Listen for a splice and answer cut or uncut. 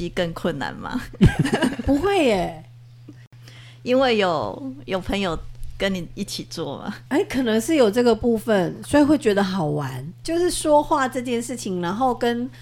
cut